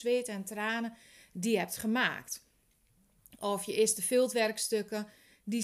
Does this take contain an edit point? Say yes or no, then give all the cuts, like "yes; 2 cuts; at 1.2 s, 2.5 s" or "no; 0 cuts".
no; 0 cuts